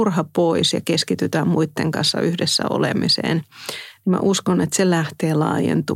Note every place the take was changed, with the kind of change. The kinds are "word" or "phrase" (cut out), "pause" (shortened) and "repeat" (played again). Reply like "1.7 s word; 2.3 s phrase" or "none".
none